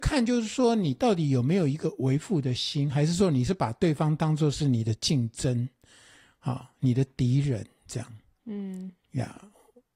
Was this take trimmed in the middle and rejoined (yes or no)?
no